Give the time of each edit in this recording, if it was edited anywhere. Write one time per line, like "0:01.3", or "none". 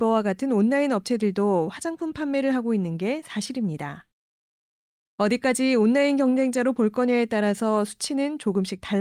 none